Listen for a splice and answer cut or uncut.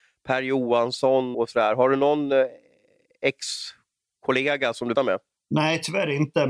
cut